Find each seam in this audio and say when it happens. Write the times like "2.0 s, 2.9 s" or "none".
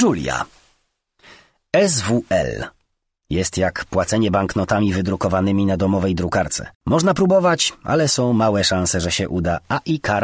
6.7 s